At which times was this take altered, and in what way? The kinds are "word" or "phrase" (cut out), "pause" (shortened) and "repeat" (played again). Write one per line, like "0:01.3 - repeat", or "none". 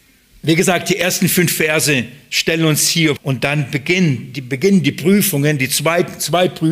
0:03.2 - word

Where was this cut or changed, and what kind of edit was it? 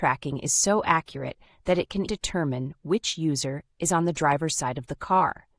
0:02.1 - word

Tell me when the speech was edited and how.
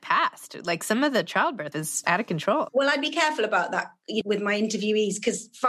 0:01.7 - word
0:02.0 - word
0:02.7 - word
0:04.2 - word

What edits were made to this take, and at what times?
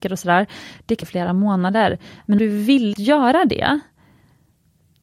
0:01.0 - phrase
0:02.4 - word
0:02.9 - word

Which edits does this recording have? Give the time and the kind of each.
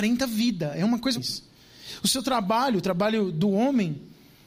0:01.2 - word

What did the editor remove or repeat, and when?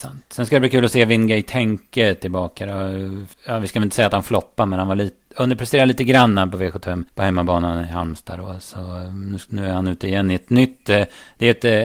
0:03.3 - pause
0:07.1 - pause

